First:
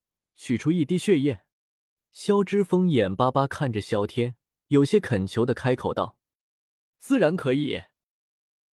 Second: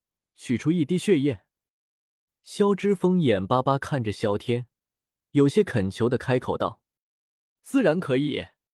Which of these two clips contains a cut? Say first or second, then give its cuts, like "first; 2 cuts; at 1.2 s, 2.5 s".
first; 2 cuts; at 1.5 s, 4.5 s